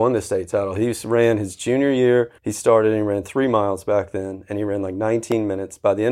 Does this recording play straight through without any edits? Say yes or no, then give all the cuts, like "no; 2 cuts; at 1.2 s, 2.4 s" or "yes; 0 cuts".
no; 1 cut; at 2.4 s